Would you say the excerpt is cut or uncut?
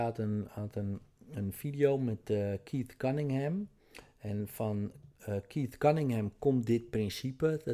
uncut